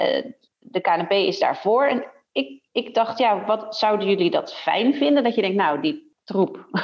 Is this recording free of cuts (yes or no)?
no